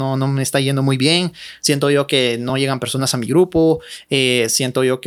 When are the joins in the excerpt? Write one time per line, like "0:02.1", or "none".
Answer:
none

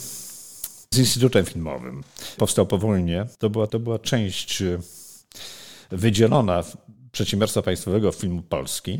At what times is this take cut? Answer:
0:00.9
0:02.4
0:03.3
0:03.7

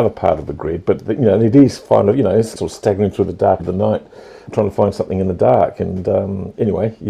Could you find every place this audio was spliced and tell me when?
0:02.6
0:03.6
0:04.5

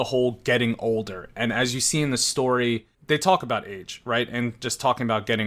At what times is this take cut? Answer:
0:02.9

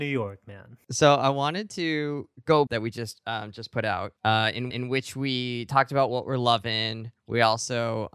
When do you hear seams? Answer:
0:02.7
0:04.2
0:04.7

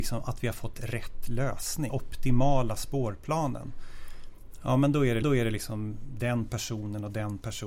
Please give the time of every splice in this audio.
0:01.9
0:05.2

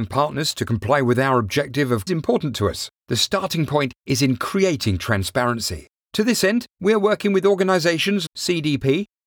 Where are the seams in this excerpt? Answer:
0:02.1
0:03.0
0:08.3

